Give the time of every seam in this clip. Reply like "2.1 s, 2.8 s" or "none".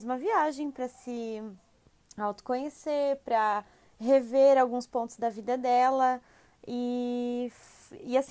none